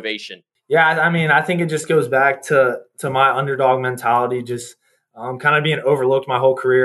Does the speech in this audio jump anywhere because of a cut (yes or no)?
no